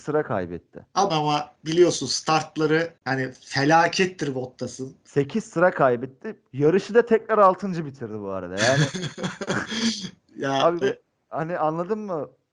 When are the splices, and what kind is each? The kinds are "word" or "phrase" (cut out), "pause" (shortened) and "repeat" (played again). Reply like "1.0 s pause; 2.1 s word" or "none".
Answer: 1.1 s phrase; 1.6 s pause; 3.0 s pause; 10.8 s word